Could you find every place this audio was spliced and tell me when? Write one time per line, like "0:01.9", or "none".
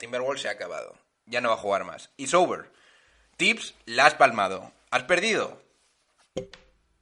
none